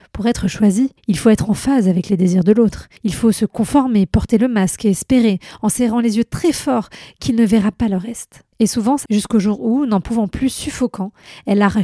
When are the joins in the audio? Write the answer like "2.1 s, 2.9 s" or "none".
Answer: 1.0 s, 3.0 s, 8.5 s, 9.1 s